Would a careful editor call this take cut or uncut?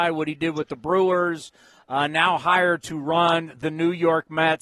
uncut